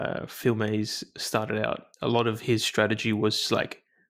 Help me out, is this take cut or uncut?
cut